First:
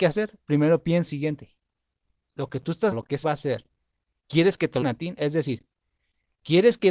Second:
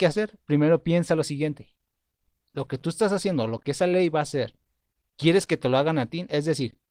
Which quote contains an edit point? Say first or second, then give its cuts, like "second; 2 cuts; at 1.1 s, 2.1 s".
first; 4 cuts; at 1.1 s, 2.9 s, 3.2 s, 4.8 s